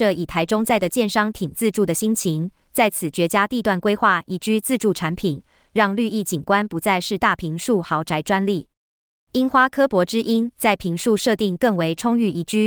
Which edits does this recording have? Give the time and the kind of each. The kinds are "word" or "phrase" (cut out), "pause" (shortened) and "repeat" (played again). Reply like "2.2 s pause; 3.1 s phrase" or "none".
none